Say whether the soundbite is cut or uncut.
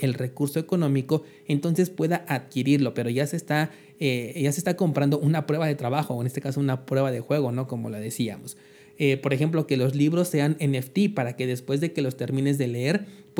uncut